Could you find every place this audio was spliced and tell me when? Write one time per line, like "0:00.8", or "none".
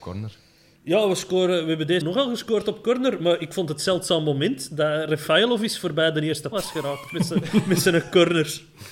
0:02.0
0:06.5